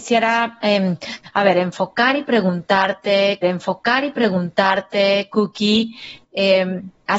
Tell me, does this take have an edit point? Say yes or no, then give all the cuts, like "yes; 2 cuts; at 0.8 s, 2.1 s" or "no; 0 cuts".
yes; 1 cut; at 3.4 s